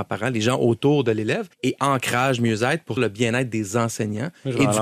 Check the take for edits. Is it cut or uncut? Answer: cut